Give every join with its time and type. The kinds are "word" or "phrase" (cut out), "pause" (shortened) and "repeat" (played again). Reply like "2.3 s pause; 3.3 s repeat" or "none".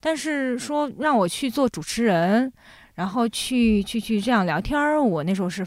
none